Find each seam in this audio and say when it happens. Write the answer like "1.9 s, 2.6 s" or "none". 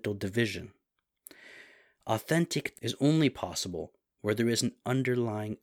2.7 s